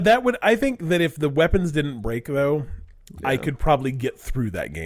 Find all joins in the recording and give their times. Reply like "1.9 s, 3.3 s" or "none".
none